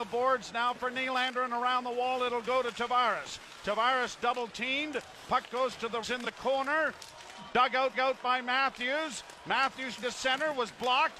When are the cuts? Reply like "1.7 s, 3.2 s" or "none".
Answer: 6.0 s, 7.9 s, 10.0 s